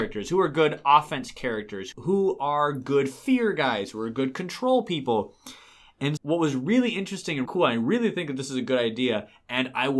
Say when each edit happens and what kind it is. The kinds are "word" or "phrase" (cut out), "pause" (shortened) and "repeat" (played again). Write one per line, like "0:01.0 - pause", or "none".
0:06.2 - word
0:07.5 - word